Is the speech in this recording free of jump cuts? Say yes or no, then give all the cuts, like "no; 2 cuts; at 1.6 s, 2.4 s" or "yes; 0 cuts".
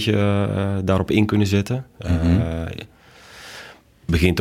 yes; 0 cuts